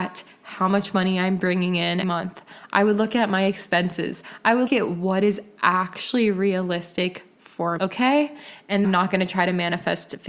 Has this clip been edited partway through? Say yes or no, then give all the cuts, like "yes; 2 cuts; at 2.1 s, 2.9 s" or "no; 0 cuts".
yes; 4 cuts; at 2.0 s, 4.7 s, 7.8 s, 8.8 s